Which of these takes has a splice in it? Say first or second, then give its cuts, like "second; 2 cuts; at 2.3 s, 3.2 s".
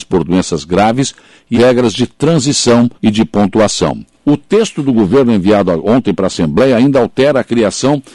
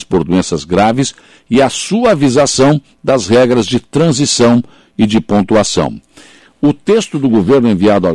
first; 3 cuts; at 1.5 s, 2.9 s, 4.1 s